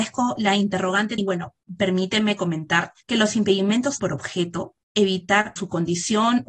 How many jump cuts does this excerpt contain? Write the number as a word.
six